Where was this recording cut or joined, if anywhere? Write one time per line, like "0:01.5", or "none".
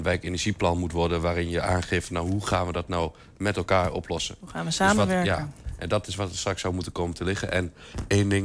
none